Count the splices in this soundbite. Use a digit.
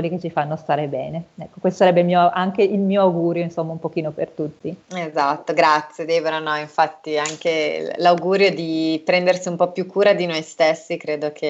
1